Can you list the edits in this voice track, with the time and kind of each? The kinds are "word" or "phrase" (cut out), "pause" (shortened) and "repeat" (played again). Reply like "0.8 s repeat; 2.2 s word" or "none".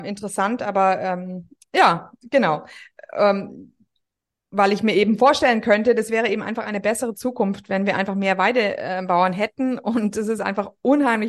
none